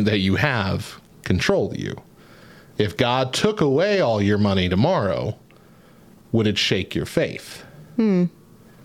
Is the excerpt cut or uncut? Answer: uncut